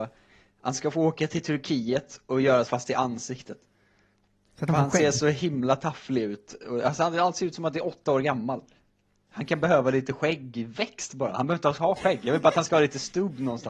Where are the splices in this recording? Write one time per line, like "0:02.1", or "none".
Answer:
0:02.7